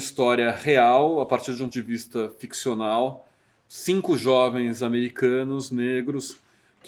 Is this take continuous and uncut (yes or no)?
no